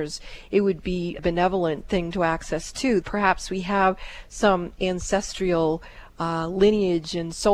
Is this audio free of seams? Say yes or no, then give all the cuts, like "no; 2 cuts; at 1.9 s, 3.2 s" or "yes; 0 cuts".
no; 2 cuts; at 1.2 s, 3.0 s